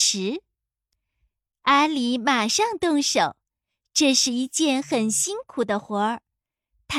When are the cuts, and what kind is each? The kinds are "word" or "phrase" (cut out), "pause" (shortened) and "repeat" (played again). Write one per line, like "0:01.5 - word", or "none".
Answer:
none